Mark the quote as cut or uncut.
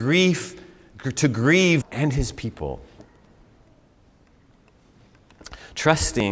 cut